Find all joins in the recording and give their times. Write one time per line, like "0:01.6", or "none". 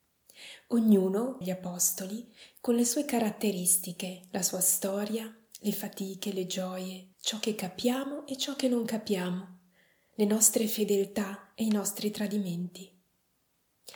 0:01.4
0:07.1